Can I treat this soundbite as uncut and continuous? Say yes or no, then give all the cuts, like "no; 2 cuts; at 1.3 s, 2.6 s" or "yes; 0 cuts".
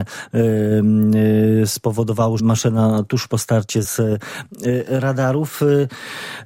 no; 2 cuts; at 2.4 s, 3.8 s